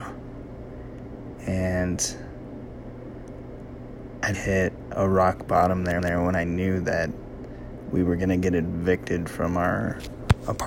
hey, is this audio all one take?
no; 2 cuts; at 4.3 s, 6.0 s

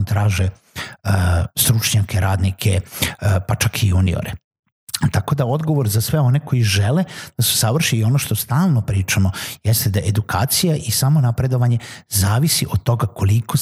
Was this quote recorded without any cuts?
yes; 0 cuts

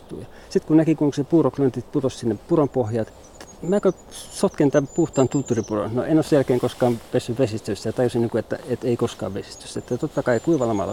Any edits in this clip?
no; 0 cuts

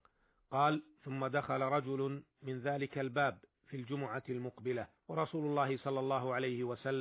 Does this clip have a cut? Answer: yes; 1 cut; at 5.0 s

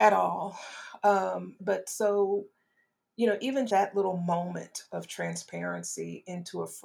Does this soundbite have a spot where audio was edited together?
yes; 2 cuts; at 1.6 s, 3.7 s

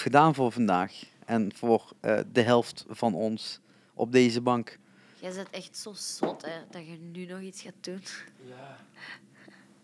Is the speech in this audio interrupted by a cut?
no; 0 cuts

